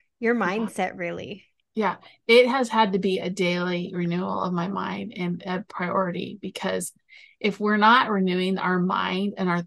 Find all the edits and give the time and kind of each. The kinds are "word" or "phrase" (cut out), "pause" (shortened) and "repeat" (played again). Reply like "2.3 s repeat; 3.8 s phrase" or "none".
none